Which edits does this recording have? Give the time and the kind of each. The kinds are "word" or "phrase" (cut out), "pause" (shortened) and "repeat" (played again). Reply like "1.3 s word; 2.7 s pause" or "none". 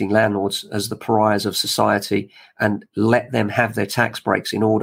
none